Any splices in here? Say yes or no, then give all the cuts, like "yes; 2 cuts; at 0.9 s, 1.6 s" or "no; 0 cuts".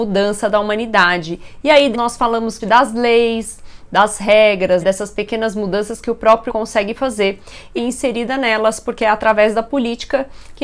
yes; 5 cuts; at 1.9 s, 2.6 s, 4.8 s, 6.5 s, 7.8 s